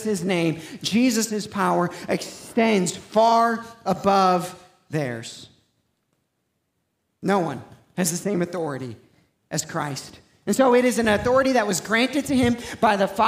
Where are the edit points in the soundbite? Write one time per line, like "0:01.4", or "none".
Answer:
none